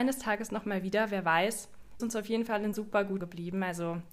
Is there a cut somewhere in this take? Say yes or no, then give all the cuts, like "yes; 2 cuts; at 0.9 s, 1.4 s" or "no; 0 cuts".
yes; 3 cuts; at 2.0 s, 2.7 s, 3.2 s